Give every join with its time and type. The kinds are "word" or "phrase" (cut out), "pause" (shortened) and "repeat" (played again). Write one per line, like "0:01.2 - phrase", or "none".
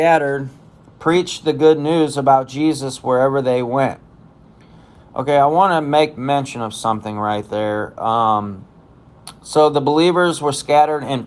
none

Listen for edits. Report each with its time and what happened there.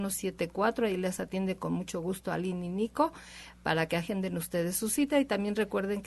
none

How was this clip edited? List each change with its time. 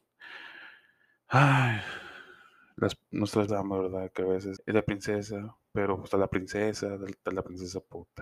0:03.5 - word
0:04.6 - word

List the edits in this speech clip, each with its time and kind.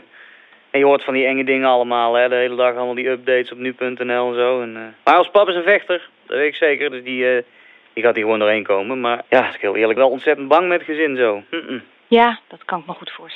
0:05.0 - pause
0:09.3 - pause
0:10.0 - phrase

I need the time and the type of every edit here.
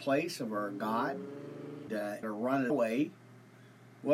0:01.9 - word
0:02.2 - word
0:02.7 - word

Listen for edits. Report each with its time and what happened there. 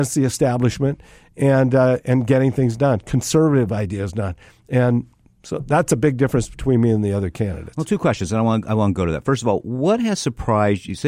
none

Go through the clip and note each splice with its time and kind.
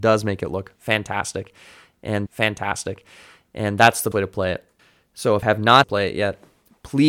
0:02.3 - repeat
0:04.1 - word
0:04.8 - pause
0:05.4 - word
0:05.8 - phrase

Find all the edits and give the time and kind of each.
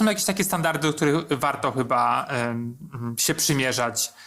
none

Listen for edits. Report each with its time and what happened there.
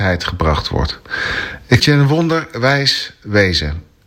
0:01.8 - word

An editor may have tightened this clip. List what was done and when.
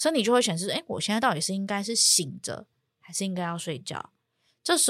none

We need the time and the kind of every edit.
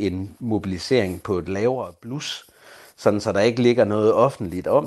none

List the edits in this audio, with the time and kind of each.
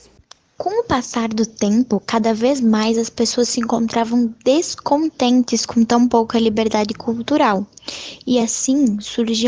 none

